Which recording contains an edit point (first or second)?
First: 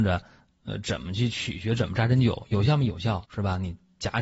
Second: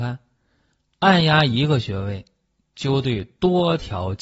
first